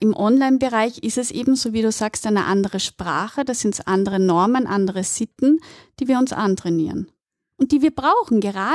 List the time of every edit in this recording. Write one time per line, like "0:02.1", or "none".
none

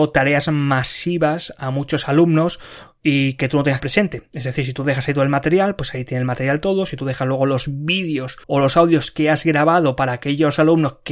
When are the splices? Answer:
0:03.8
0:08.4

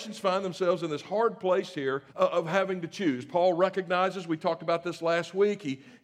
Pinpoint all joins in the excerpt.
0:02.1

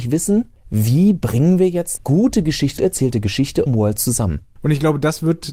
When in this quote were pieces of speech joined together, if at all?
0:02.0
0:02.8
0:03.7

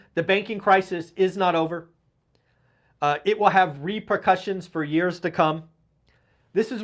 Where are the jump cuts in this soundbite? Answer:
none

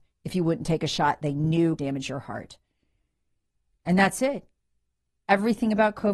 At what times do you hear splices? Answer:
0:01.8
0:03.5

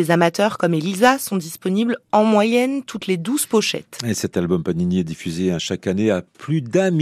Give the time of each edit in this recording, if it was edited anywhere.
none

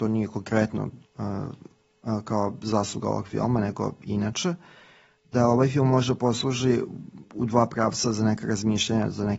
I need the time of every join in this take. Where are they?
0:01.1
0:07.2

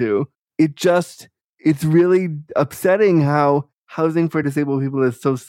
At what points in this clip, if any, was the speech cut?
none

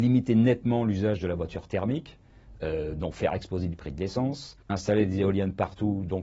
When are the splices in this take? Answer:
0:04.6

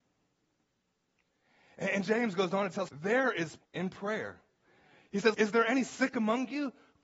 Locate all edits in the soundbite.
0:02.9
0:03.6
0:05.3

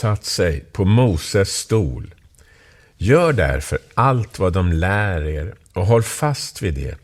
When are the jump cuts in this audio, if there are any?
none

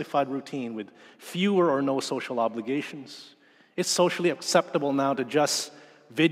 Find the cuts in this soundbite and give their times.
none

